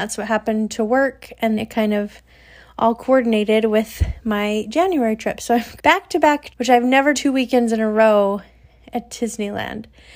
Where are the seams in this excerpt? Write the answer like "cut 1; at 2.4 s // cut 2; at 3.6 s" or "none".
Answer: cut 1; at 1.6 s // cut 2; at 5.8 s // cut 3; at 6.5 s // cut 4; at 7.1 s

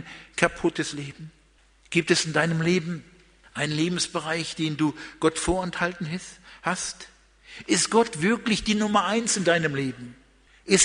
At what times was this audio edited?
none

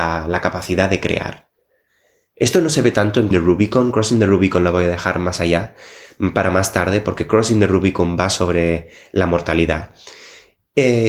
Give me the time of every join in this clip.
cut 1; at 3.3 s

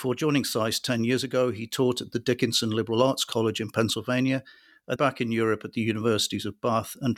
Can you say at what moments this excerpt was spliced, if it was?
cut 1; at 5.0 s

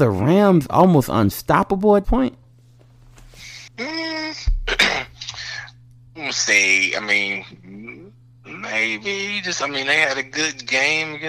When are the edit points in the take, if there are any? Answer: cut 1; at 2.0 s // cut 2; at 3.7 s

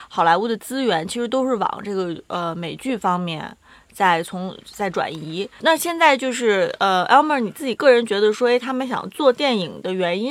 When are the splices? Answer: cut 1; at 5.6 s

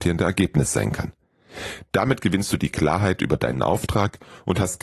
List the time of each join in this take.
none

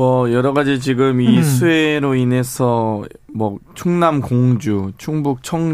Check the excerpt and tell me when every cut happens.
none

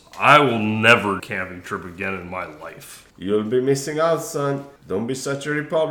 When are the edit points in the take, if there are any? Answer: cut 1; at 1.2 s // cut 2; at 3.1 s // cut 3; at 4.8 s

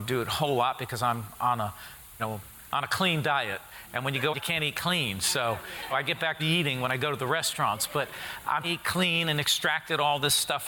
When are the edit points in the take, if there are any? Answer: cut 1; at 2.2 s // cut 2; at 4.3 s // cut 3; at 5.9 s // cut 4; at 6.4 s // cut 5; at 8.6 s

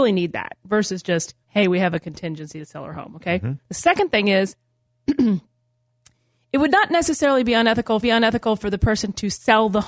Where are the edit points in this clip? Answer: cut 1; at 1.4 s // cut 2; at 3.6 s // cut 3; at 8.0 s

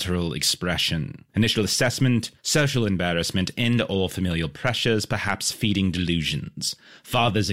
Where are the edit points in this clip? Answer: cut 1; at 1.3 s // cut 2; at 2.4 s

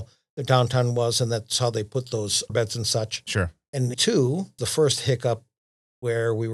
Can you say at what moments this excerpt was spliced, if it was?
cut 1; at 2.5 s // cut 2; at 3.9 s // cut 3; at 4.6 s

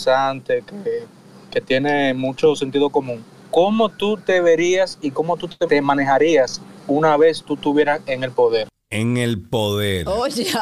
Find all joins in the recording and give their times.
none

